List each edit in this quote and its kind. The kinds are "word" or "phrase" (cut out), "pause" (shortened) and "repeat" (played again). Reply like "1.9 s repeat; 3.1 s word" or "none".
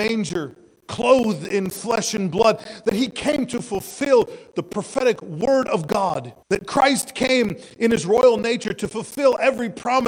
6.4 s pause